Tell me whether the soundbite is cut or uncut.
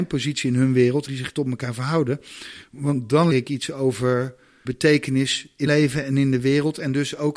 cut